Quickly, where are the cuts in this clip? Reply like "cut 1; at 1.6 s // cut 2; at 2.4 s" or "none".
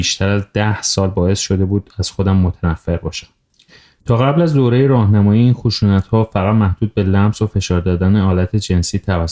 none